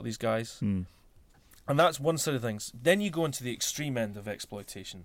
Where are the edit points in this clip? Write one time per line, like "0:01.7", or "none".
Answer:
none